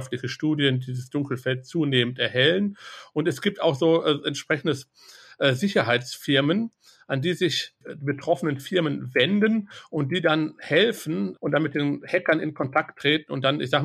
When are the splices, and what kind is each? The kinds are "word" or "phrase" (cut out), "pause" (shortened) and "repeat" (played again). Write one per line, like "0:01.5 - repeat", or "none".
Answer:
none